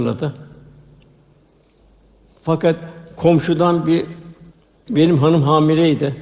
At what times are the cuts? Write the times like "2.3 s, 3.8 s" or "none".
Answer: 4.5 s